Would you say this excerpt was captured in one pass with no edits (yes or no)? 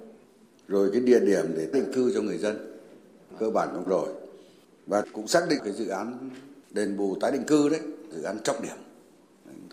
no